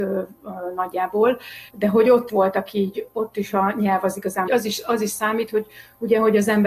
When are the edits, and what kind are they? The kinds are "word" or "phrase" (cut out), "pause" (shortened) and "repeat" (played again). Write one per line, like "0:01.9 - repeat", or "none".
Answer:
0:01.7 - pause
0:02.3 - word
0:04.5 - phrase

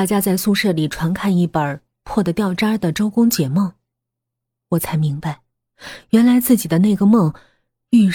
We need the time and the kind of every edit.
none

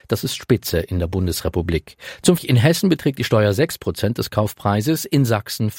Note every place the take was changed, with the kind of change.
0:02.4 - word

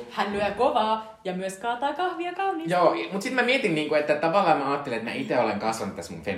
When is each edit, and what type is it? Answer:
none

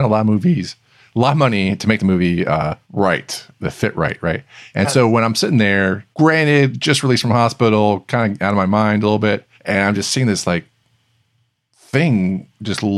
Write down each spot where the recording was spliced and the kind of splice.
0:02.8 - pause
0:06.1 - pause
0:09.5 - pause

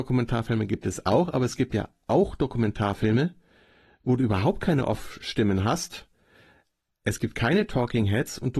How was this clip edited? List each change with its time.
none

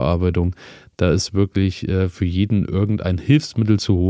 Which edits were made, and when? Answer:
none

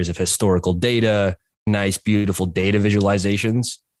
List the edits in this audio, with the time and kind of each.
0:01.7 - word

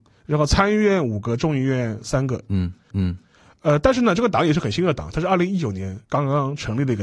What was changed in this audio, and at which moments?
0:02.9 - repeat
0:06.0 - pause

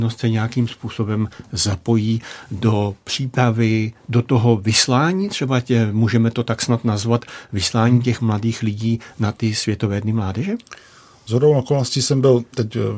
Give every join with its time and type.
none

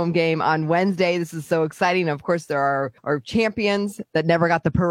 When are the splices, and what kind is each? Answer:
0:03.0 - pause

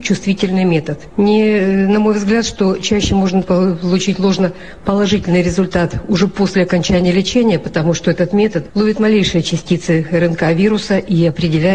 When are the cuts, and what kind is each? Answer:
0:03.4 - word

